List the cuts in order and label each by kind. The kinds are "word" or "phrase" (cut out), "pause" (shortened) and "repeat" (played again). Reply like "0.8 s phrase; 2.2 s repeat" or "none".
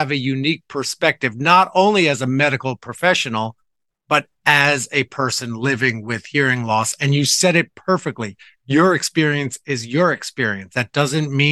none